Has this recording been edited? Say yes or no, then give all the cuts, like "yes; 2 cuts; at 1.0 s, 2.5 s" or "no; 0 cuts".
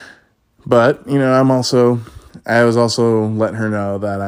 no; 0 cuts